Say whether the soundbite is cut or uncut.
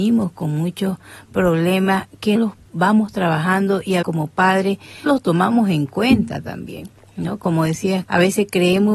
cut